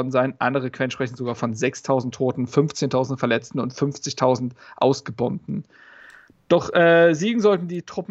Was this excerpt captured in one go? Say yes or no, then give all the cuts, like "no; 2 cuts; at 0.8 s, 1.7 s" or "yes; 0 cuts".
yes; 0 cuts